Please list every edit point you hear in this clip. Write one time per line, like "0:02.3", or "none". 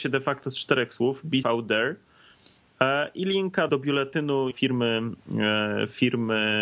0:01.4
0:03.7
0:04.5